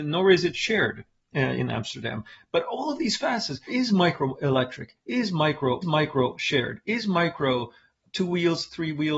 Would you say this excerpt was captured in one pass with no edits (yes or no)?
no